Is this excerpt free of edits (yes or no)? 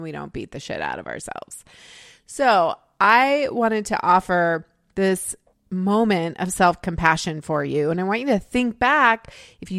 yes